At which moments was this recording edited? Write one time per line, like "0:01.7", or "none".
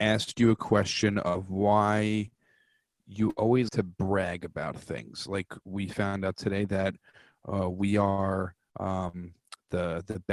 0:03.7

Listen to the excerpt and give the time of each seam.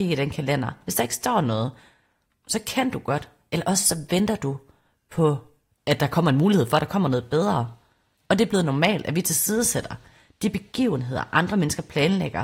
none

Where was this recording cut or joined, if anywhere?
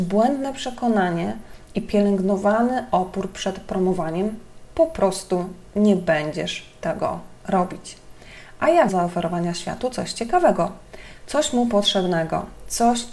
0:07.4
0:08.9

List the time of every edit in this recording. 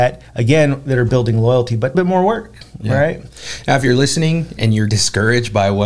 0:01.9
0:04.6
0:04.9

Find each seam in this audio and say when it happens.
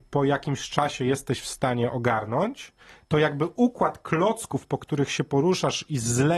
none

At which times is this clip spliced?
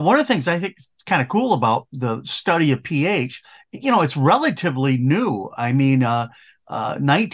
0:01.9

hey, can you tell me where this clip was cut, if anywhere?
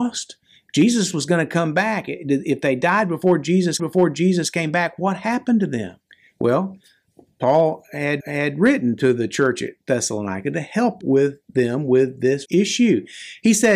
0:03.8
0:06.1
0:08.2
0:11.0
0:11.4
0:12.4

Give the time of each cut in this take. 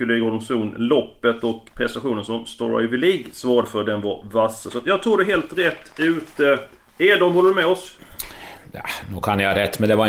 0:01.7

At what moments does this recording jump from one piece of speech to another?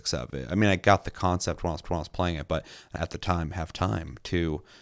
0:01.8
0:03.0

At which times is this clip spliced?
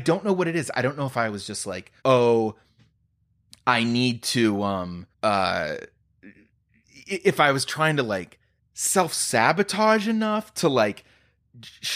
0:02.0
0:05.1
0:08.6

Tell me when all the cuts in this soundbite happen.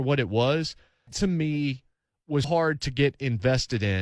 0:01.1
0:02.4

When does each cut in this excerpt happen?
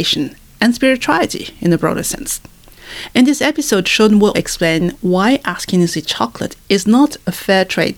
0:04.3

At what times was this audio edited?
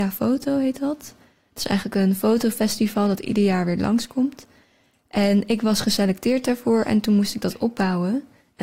none

